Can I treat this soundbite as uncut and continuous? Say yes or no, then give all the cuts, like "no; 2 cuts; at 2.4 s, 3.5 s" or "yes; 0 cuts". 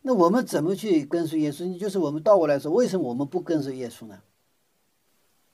yes; 0 cuts